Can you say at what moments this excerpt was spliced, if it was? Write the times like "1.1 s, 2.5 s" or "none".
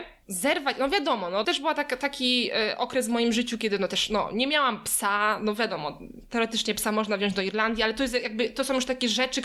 1.4 s